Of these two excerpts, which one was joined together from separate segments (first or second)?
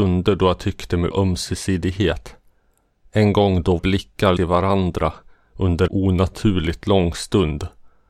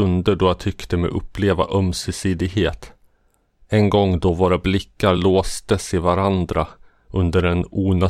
first